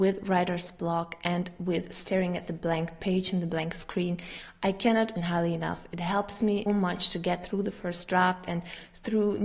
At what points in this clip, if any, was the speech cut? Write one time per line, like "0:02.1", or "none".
0:05.2
0:06.7